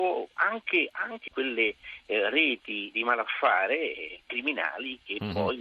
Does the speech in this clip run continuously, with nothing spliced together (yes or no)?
no